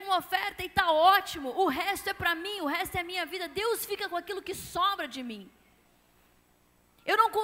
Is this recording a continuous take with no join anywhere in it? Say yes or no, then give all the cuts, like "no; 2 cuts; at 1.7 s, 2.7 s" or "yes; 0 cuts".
yes; 0 cuts